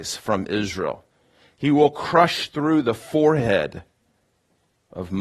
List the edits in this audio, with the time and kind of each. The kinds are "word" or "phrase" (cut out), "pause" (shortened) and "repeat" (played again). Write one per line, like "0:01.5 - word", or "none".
none